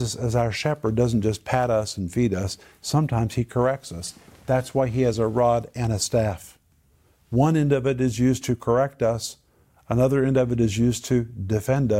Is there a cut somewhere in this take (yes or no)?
no